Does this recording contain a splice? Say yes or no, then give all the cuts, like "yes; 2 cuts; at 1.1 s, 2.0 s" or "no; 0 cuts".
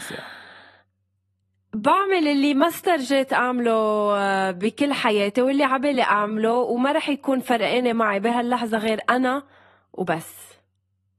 no; 0 cuts